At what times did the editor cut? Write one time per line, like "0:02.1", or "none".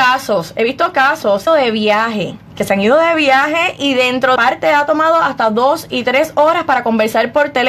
0:01.5
0:02.5
0:04.4

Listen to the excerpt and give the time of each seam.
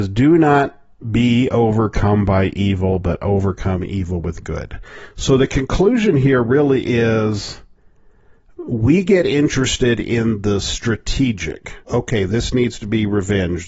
0:11.8

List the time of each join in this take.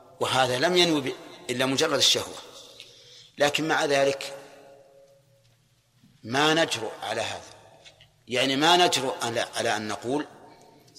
none

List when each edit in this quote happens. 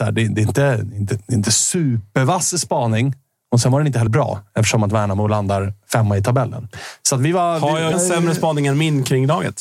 0:04.1
0:07.9

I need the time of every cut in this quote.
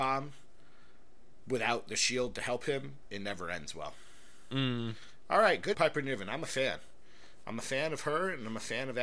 0:05.7

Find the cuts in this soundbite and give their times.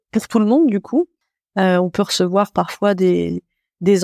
none

